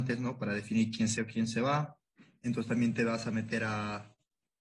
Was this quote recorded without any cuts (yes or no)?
no